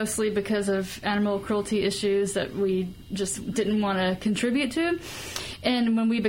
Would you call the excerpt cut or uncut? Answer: uncut